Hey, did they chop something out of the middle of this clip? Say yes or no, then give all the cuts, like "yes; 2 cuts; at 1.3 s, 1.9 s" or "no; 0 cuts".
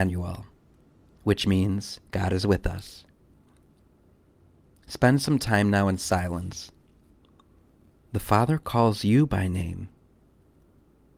yes; 1 cut; at 2.1 s